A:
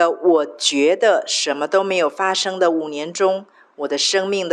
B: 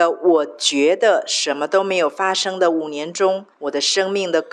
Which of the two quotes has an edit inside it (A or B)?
B